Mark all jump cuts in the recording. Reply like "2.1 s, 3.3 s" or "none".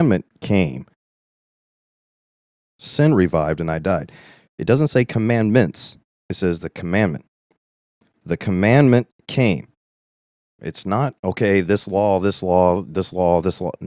none